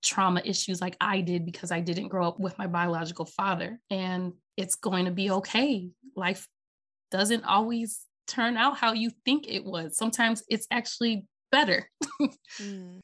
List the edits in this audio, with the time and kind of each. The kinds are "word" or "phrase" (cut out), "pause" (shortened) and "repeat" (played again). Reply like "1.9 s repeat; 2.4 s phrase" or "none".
none